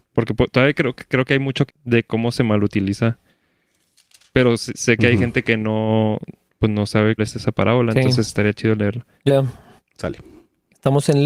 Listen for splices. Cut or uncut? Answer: cut